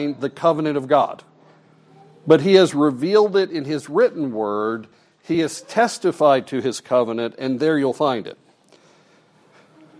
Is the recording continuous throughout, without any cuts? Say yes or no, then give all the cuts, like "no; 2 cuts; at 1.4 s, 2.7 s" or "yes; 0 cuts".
yes; 0 cuts